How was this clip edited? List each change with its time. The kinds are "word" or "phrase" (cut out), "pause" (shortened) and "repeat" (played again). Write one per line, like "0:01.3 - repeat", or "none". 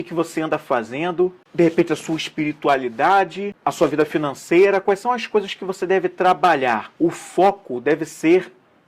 0:07.0 - pause